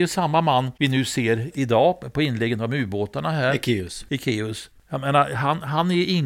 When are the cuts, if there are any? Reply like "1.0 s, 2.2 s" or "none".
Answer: 4.8 s